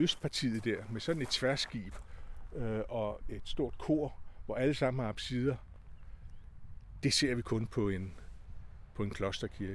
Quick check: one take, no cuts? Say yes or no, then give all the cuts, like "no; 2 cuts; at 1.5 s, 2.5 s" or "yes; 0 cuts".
no; 1 cut; at 3.2 s